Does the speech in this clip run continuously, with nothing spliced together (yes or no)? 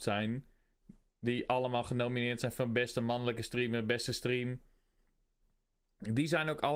yes